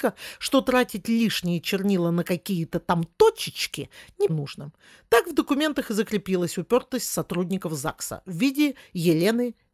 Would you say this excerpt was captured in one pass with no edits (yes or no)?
no